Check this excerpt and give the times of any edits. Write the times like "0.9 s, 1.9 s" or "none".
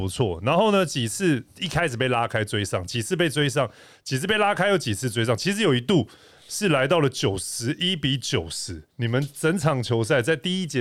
8.9 s

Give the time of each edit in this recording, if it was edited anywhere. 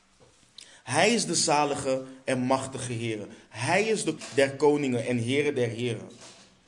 4.2 s

